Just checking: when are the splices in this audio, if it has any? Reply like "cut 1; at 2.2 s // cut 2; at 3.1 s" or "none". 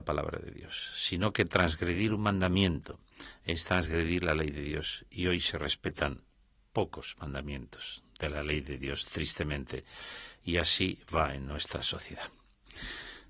none